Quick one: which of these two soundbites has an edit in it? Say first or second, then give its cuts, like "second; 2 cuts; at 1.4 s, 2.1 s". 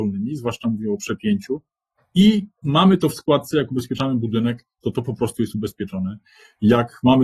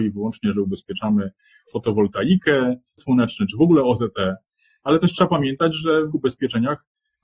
second; 2 cuts; at 3.0 s, 6.1 s